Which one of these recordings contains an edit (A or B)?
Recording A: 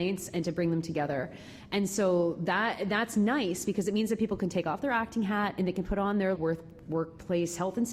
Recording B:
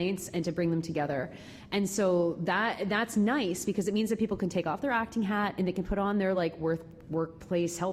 A